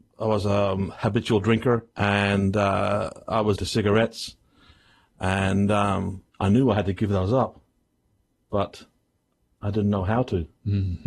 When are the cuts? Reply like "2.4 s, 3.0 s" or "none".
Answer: 1.9 s, 3.6 s, 6.3 s